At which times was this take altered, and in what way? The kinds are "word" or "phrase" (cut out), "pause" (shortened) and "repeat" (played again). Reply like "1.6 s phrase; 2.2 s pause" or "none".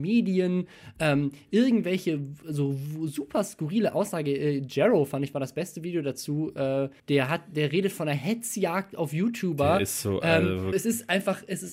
7.0 s pause; 10.7 s word